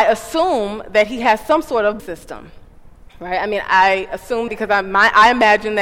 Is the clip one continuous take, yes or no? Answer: no